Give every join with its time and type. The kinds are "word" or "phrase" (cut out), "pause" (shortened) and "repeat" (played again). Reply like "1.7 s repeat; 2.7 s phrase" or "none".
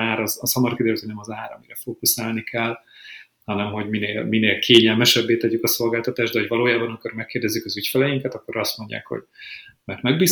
none